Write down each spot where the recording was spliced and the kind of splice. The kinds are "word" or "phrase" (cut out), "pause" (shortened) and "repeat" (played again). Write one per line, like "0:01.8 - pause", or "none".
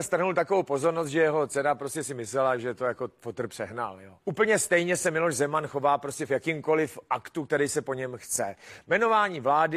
0:04.2 - pause